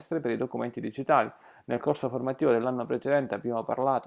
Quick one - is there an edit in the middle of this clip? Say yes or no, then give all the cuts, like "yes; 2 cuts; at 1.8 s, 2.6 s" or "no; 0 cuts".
no; 0 cuts